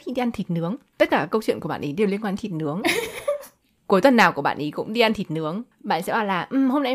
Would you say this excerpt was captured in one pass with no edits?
no; 1 cut; at 5.7 s

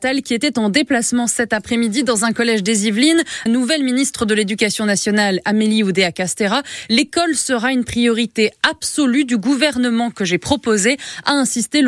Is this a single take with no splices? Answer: no; 1 cut; at 3.5 s

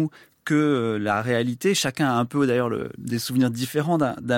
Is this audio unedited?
yes; 0 cuts

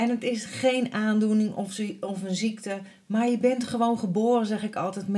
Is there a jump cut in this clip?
no; 0 cuts

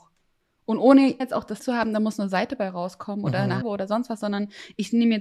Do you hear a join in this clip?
yes; 3 cuts; at 1.2 s, 1.6 s, 3.6 s

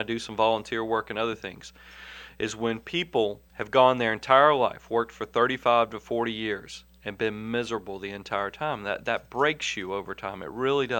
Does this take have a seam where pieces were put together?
yes; 1 cut; at 3.5 s

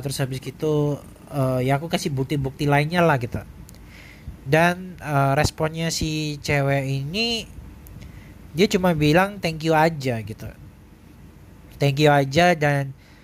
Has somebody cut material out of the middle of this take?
no; 0 cuts

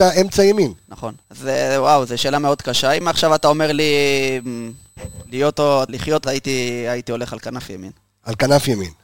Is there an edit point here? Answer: yes; 4 cuts; at 1.2 s, 3.0 s, 5.9 s, 6.2 s

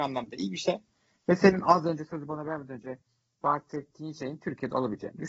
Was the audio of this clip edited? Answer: no; 0 cuts

